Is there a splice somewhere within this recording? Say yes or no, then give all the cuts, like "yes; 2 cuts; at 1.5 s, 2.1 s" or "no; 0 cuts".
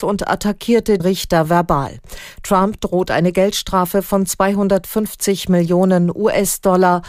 yes; 1 cut; at 1.0 s